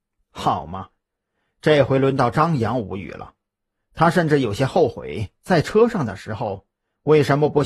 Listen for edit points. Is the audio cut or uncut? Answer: uncut